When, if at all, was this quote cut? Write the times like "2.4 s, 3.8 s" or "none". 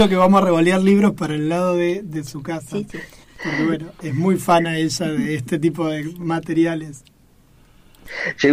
3.2 s

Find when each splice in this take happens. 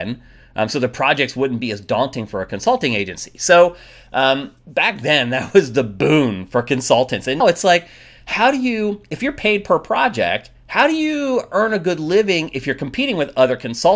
4.6 s, 7.4 s, 10.6 s

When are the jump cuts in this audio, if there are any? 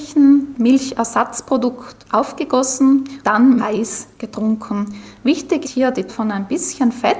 3.2 s, 3.6 s, 5.6 s, 6.1 s

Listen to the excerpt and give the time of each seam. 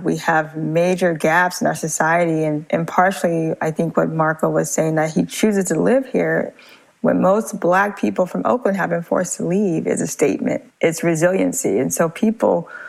none

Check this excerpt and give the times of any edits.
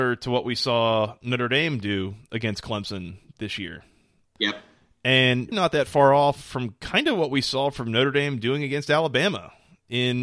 5.5 s

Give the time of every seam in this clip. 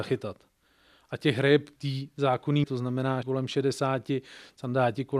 1.8 s, 2.6 s, 3.2 s

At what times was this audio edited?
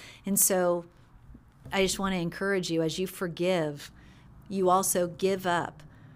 none

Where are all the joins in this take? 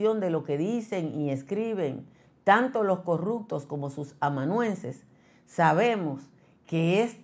none

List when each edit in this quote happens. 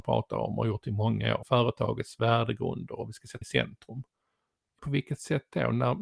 1.4 s, 3.4 s, 4.8 s

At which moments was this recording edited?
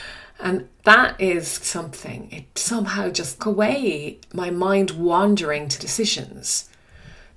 1.6 s, 3.4 s, 4.3 s, 5.8 s

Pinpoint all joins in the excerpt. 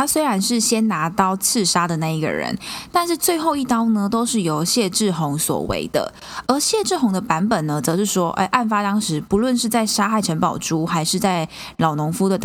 none

